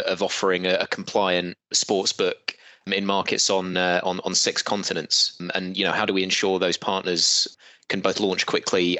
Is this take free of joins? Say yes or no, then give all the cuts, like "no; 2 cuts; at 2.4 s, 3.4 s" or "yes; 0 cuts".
yes; 0 cuts